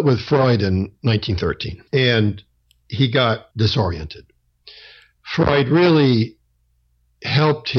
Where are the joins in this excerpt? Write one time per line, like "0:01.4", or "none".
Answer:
0:01.9
0:03.5